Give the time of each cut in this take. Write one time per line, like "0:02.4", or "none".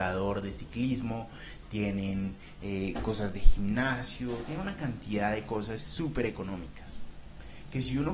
none